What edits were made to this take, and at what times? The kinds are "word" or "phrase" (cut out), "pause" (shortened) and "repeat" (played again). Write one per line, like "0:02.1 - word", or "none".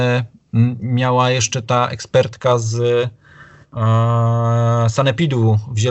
none